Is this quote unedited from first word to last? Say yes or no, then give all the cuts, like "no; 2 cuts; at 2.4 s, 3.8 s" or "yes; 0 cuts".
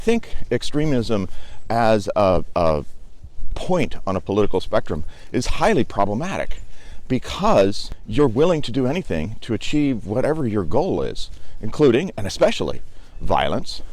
yes; 0 cuts